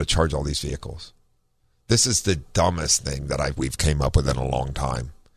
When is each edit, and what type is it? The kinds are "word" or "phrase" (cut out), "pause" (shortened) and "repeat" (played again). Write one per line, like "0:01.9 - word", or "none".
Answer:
0:03.5 - word